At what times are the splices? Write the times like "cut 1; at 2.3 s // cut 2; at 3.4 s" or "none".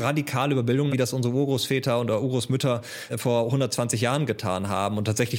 cut 1; at 0.9 s // cut 2; at 3.1 s